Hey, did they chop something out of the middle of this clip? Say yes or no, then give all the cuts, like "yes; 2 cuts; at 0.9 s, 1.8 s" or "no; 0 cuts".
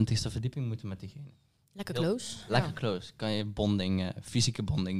no; 0 cuts